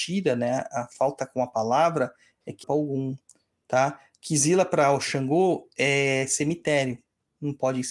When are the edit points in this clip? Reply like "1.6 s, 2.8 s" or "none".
2.6 s

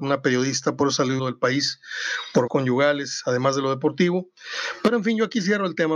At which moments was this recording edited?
1.2 s, 2.5 s

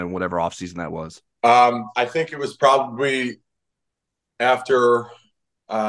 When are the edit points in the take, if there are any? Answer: 1.3 s

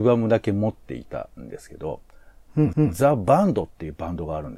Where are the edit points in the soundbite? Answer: 2.7 s

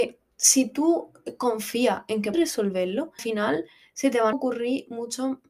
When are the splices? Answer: 2.3 s, 3.2 s, 4.3 s

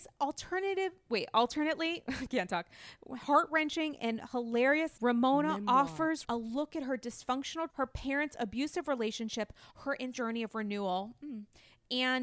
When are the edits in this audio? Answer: 5.0 s, 6.2 s, 7.7 s, 10.1 s

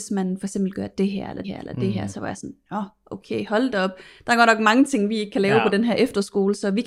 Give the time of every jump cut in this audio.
1.4 s

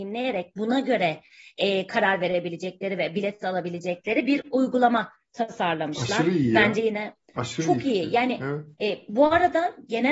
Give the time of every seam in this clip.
8.7 s

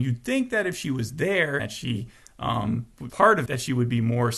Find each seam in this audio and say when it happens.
1.6 s, 3.1 s, 3.5 s

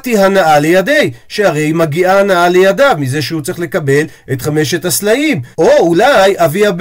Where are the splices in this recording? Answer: 5.5 s

